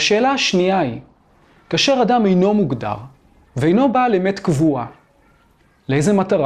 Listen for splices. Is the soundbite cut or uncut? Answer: uncut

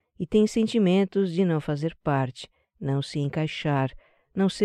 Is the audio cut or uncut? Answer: uncut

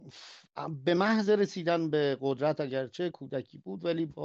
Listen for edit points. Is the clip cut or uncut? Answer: uncut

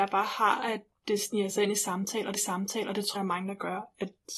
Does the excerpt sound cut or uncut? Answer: cut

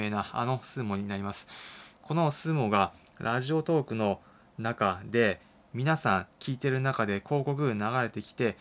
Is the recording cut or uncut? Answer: uncut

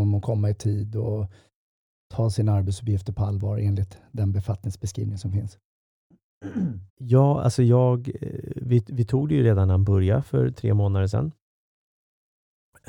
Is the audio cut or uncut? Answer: cut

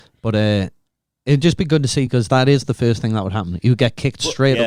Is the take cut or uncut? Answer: uncut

